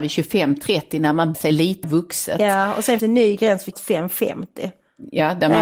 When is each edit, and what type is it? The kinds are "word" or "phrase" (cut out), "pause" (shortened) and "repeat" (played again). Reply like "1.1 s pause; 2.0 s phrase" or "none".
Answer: 1.3 s phrase; 1.8 s word; 3.0 s word; 3.7 s word

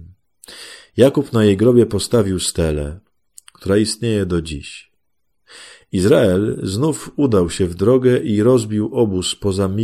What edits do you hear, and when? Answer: none

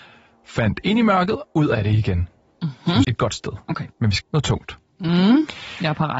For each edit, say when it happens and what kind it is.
1.4 s word; 3.0 s word; 4.2 s word

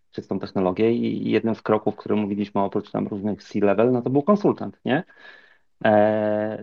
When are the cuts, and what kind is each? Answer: none

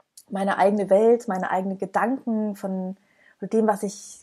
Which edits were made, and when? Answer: none

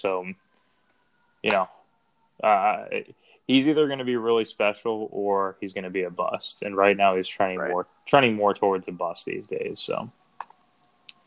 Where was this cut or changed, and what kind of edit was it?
none

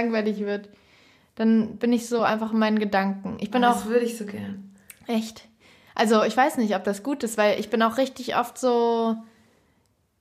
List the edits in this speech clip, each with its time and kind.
none

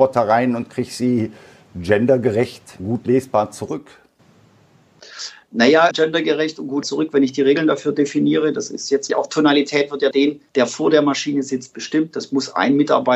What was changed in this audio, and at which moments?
2.8 s word; 5.9 s word; 6.8 s word; 9.1 s word; 10.1 s word; 10.5 s pause

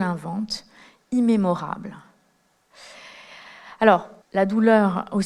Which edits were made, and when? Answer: 4.2 s pause

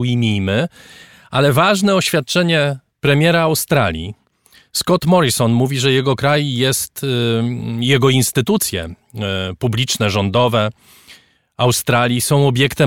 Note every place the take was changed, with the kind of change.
none

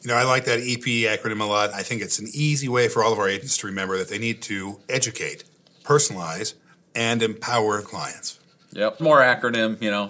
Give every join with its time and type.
1.7 s word; 7.8 s word; 9.0 s word

